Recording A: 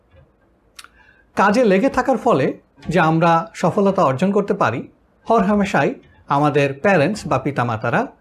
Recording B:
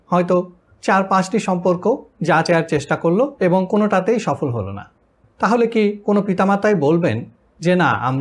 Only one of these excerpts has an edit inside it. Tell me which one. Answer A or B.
B